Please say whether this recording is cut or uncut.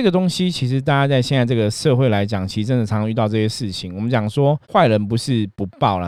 cut